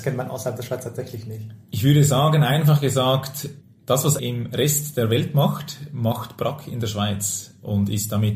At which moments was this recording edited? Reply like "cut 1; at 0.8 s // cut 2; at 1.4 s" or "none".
cut 1; at 1.6 s // cut 2; at 3.6 s // cut 3; at 4.2 s